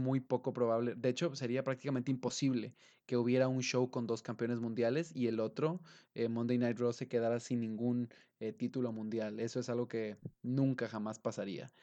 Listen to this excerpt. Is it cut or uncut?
uncut